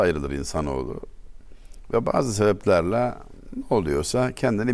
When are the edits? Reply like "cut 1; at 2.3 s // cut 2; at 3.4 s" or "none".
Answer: none